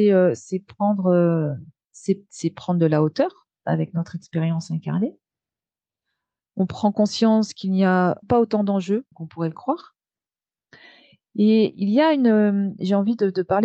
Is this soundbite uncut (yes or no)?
no